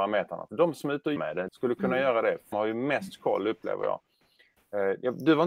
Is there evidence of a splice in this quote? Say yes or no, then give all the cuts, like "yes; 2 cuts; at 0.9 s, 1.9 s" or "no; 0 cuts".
yes; 3 cuts; at 1.2 s, 1.5 s, 2.5 s